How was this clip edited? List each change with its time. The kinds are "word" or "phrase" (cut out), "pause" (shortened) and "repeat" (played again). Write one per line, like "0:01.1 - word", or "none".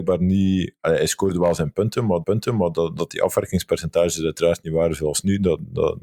0:02.2 - repeat